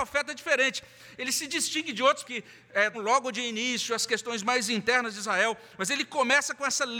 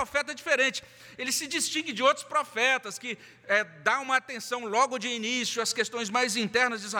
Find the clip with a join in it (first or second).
first